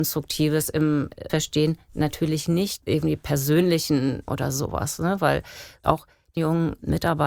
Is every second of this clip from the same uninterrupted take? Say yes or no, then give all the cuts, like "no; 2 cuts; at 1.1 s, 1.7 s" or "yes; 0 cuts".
no; 5 cuts; at 1.3 s, 2.8 s, 4.3 s, 5.8 s, 6.4 s